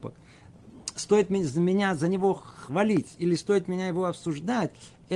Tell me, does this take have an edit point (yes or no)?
no